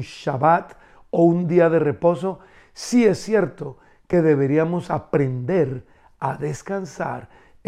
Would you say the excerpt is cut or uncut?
uncut